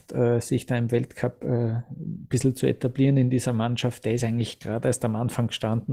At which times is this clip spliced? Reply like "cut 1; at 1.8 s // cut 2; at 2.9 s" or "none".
none

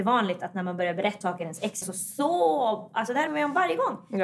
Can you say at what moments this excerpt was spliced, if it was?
cut 1; at 1.2 s // cut 2; at 1.8 s // cut 3; at 3.3 s

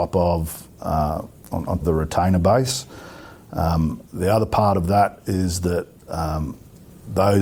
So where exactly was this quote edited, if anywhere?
cut 1; at 1.8 s // cut 2; at 4.1 s // cut 3; at 6.0 s

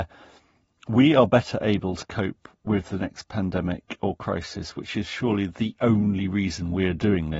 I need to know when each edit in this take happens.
none

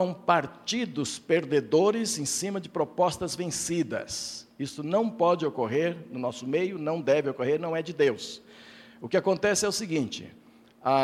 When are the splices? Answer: none

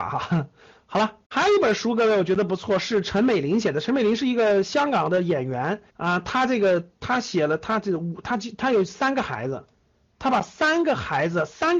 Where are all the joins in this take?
cut 1; at 1.2 s // cut 2; at 5.9 s

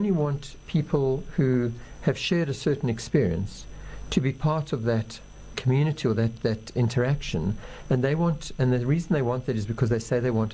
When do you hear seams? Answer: cut 1; at 5.5 s // cut 2; at 6.4 s

